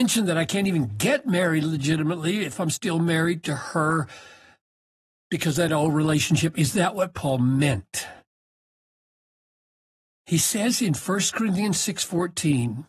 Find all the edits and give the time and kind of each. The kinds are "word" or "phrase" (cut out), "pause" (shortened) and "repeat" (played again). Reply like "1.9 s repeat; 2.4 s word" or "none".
none